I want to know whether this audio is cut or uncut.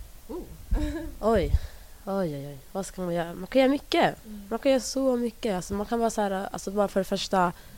uncut